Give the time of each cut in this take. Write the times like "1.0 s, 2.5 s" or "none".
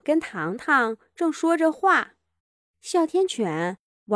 2.4 s